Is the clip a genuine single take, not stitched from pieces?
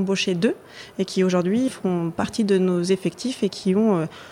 no; 1 cut; at 1.7 s

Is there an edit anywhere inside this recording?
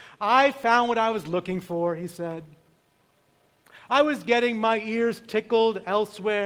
no; 0 cuts

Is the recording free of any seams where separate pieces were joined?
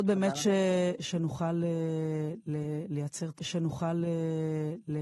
no; 1 cut; at 3.4 s

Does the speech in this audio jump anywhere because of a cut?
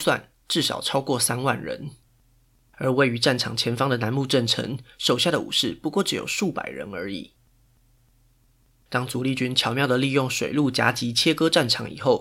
no; 0 cuts

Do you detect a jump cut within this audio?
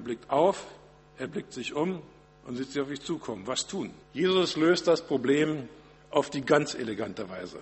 yes; 3 cuts; at 2.2 s, 4.0 s, 6.0 s

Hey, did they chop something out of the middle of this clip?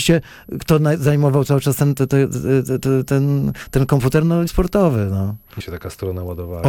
yes; 3 cuts; at 2.0 s, 4.5 s, 5.6 s

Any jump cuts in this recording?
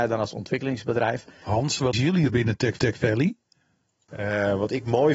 yes; 3 cuts; at 1.9 s, 2.3 s, 2.8 s

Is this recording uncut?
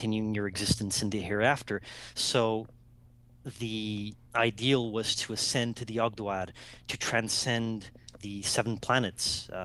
no; 2 cuts; at 4.3 s, 8.2 s

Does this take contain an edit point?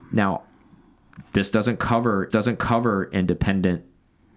yes; 1 cut; at 2.3 s

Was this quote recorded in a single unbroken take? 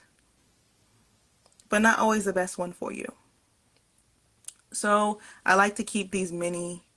yes; 0 cuts

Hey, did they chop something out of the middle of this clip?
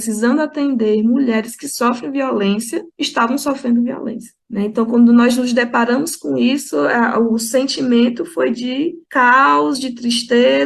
yes; 3 cuts; at 2.9 s, 4.4 s, 9.0 s

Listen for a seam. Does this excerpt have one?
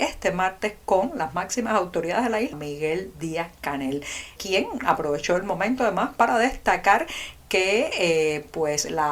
yes; 2 cuts; at 2.5 s, 4.4 s

